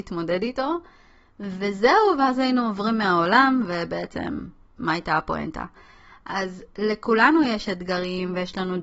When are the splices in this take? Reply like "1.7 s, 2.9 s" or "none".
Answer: none